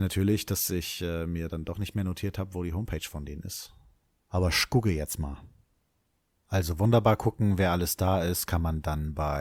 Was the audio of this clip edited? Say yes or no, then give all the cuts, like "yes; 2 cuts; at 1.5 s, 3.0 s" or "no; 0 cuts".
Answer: no; 0 cuts